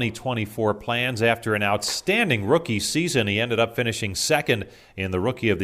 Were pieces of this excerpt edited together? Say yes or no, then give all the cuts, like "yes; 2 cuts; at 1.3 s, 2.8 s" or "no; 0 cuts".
no; 0 cuts